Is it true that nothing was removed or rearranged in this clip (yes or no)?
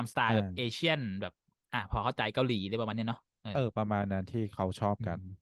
yes